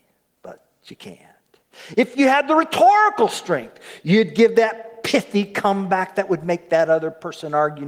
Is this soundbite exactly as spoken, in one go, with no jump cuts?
yes; 0 cuts

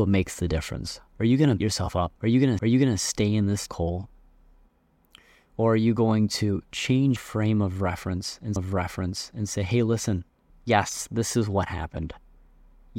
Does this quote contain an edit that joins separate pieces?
yes; 8 cuts; at 1.1 s, 1.6 s, 2.2 s, 2.6 s, 3.7 s, 7.2 s, 8.6 s, 10.5 s

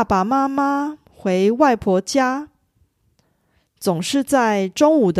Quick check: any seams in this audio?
no; 0 cuts

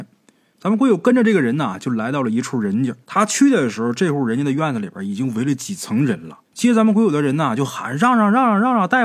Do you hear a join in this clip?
yes; 2 cuts; at 3.0 s, 6.5 s

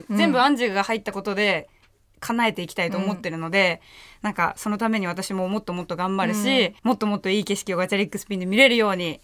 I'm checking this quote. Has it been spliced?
yes; 1 cut; at 6.8 s

